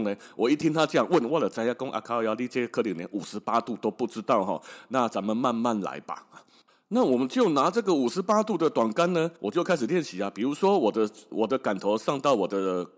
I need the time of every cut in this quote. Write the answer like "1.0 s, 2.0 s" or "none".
9.4 s